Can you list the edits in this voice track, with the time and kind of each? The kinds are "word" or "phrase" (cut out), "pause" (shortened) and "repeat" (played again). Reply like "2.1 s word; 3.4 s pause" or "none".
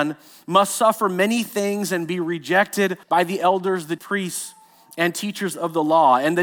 3.0 s pause; 4.0 s word